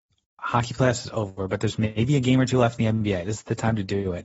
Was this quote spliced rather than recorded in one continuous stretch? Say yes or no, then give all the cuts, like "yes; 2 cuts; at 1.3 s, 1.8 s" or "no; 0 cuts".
no; 0 cuts